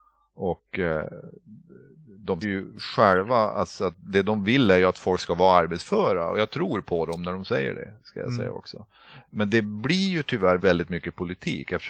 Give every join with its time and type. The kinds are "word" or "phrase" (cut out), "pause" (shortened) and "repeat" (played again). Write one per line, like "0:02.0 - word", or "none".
0:02.4 - word
0:10.6 - word